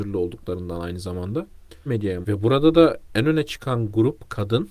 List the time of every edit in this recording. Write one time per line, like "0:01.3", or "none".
0:01.9
0:02.2